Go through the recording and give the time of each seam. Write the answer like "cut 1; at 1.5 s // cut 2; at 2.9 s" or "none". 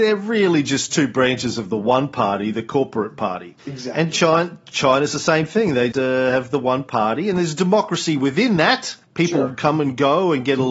cut 1; at 3.6 s // cut 2; at 5.9 s // cut 3; at 9.0 s